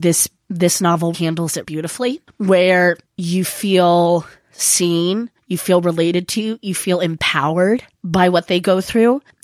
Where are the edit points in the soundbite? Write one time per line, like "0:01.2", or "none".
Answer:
0:01.1
0:01.6